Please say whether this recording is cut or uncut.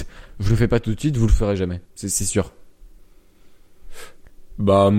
cut